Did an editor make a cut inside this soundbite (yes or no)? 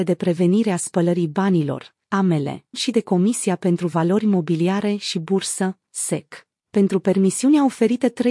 yes